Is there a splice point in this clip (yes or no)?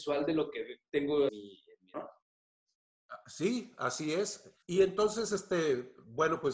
yes